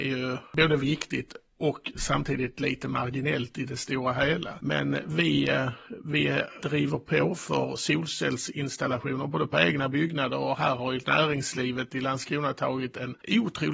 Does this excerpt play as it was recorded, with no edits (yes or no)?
yes